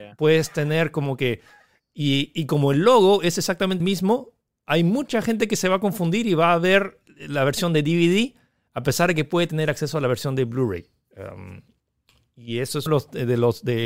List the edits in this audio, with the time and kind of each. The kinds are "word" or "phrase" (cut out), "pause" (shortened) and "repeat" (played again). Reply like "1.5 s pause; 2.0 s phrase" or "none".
3.8 s word; 12.9 s word